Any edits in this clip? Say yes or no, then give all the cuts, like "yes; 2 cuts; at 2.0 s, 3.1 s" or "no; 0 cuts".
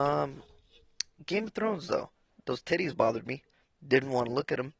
yes; 2 cuts; at 2.3 s, 3.5 s